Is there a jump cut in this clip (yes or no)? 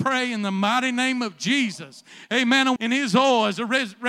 yes